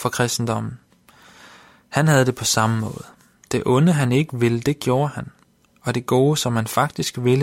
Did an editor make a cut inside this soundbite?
no; 0 cuts

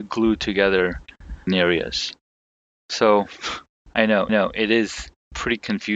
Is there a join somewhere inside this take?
yes; 2 cuts; at 1.5 s, 4.3 s

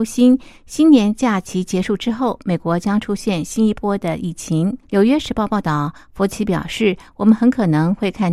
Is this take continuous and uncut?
no; 1 cut; at 4.8 s

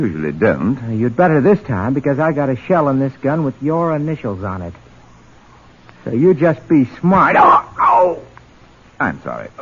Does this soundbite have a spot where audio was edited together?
no; 0 cuts

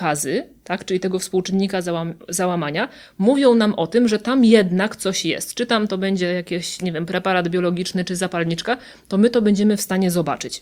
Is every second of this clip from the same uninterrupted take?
yes; 0 cuts

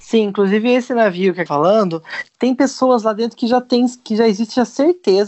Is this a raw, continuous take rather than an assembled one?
no; 1 cut; at 1.5 s

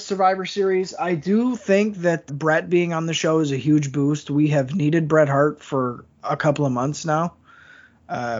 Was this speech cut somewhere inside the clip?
yes; 2 cuts; at 2.3 s, 6.1 s

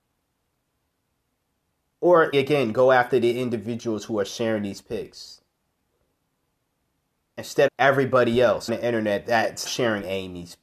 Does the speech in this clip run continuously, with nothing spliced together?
no; 4 cuts; at 2.3 s, 7.7 s, 8.7 s, 9.6 s

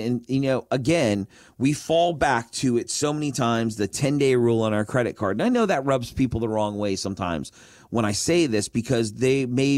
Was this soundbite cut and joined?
no; 0 cuts

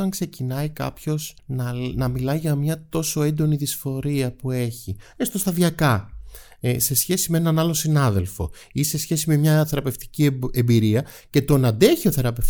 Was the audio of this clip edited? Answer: yes; 1 cut; at 1.4 s

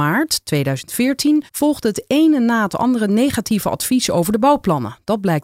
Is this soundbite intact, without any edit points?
no; 1 cut; at 1.5 s

